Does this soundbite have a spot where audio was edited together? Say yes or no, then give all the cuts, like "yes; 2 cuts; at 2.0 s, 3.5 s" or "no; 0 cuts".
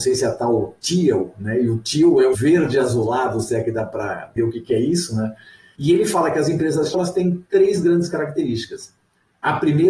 yes; 3 cuts; at 2.3 s, 4.4 s, 6.9 s